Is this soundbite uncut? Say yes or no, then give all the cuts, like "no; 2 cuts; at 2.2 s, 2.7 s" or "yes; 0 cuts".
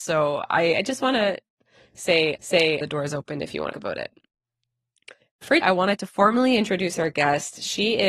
no; 3 cuts; at 2.3 s, 3.7 s, 5.6 s